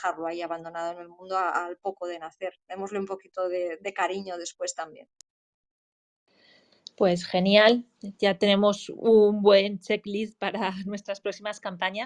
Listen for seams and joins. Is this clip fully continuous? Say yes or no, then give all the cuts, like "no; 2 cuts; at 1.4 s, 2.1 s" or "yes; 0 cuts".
no; 1 cut; at 6.9 s